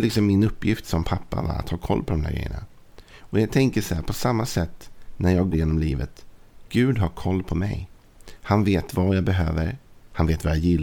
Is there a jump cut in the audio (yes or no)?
yes